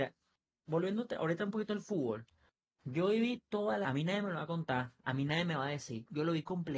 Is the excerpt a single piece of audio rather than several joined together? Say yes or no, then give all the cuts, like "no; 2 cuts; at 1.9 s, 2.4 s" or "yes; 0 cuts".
no; 1 cut; at 3.8 s